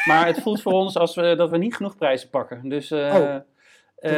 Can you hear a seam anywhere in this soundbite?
no; 0 cuts

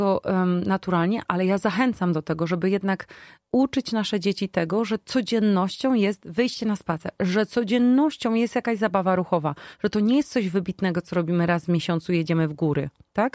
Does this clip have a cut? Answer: no; 0 cuts

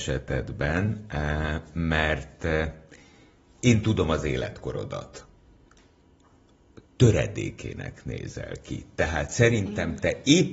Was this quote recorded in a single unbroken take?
yes; 0 cuts

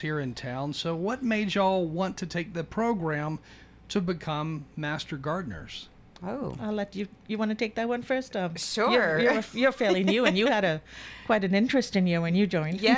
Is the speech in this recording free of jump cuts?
yes; 0 cuts

